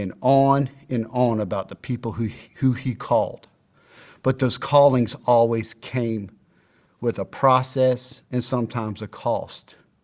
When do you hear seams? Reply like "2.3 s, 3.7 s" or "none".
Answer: none